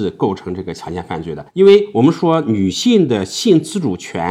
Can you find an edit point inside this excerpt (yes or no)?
yes